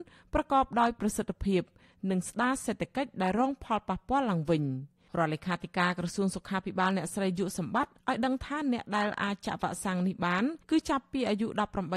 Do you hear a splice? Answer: yes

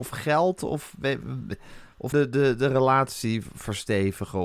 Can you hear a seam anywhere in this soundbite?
yes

